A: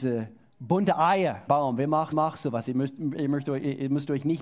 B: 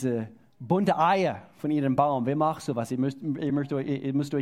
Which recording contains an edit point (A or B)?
A